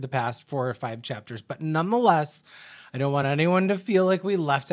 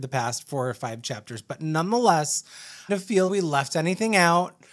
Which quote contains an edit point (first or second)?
second